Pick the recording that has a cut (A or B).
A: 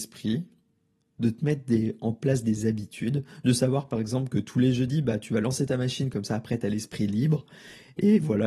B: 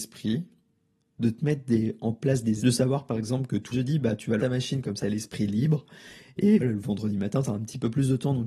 B